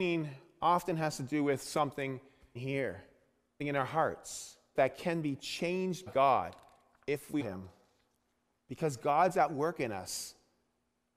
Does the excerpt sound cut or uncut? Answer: cut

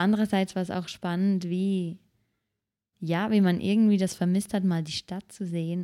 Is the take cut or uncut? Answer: uncut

